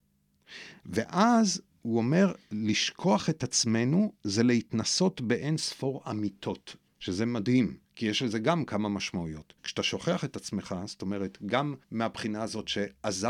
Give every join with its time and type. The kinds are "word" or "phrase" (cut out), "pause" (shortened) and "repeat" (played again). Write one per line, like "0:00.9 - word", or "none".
0:06.9 - pause
0:07.8 - pause
0:09.6 - pause
0:11.8 - pause